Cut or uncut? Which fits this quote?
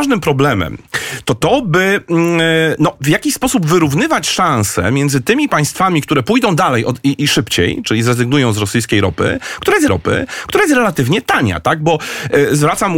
cut